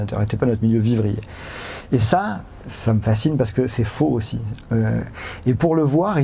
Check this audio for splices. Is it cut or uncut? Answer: uncut